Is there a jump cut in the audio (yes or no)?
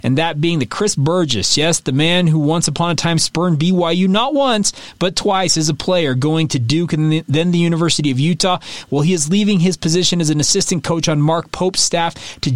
no